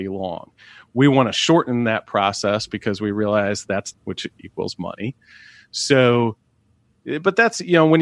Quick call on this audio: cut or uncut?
cut